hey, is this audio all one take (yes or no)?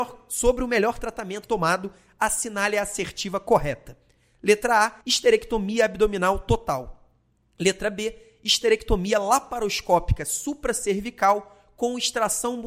no